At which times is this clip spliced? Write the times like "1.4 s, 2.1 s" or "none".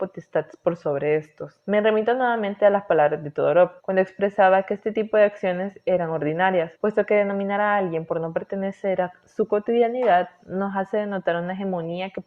1.6 s, 3.8 s, 6.8 s